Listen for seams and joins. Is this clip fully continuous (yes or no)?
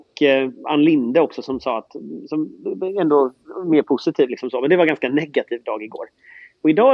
yes